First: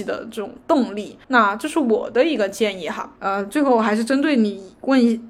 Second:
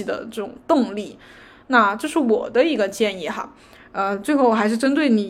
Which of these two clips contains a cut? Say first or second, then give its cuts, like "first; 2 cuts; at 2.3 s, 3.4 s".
first; 2 cuts; at 1.2 s, 3.2 s